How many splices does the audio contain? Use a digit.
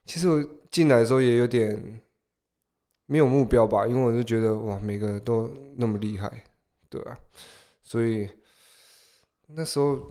0